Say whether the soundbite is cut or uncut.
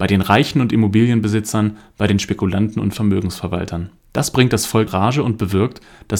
cut